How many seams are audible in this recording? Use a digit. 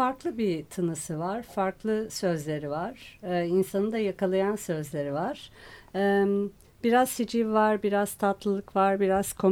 0